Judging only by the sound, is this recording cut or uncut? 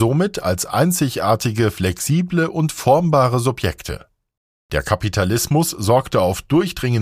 uncut